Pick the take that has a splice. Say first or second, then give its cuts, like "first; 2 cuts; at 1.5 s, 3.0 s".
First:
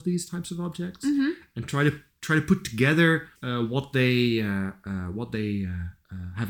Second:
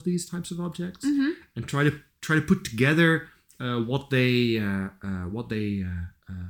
first; 1 cut; at 3.4 s